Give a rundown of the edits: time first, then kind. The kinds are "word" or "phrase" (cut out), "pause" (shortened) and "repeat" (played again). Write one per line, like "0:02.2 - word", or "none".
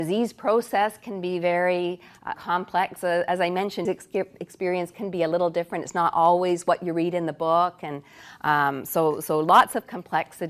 0:02.3 - word
0:03.9 - word